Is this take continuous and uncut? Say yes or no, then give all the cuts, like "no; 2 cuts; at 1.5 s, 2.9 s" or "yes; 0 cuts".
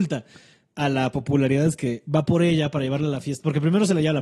yes; 0 cuts